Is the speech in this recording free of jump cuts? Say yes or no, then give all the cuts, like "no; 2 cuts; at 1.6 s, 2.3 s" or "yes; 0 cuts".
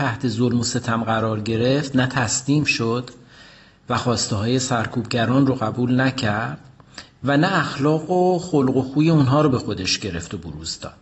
yes; 0 cuts